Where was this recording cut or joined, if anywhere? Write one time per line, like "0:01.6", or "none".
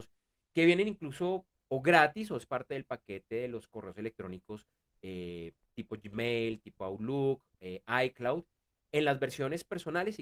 none